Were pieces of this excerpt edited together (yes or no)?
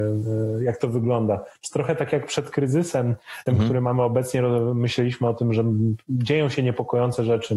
yes